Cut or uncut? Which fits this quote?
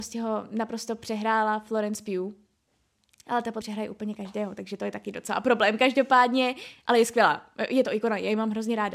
cut